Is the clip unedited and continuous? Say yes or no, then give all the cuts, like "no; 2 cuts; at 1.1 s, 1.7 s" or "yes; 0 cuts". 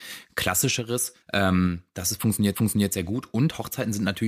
no; 2 cuts; at 1.2 s, 2.5 s